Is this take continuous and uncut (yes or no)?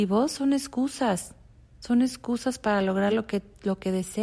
yes